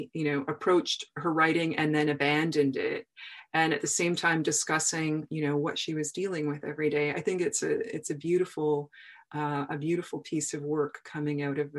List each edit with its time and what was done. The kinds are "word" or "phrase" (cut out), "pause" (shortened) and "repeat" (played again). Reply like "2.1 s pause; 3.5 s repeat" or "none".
none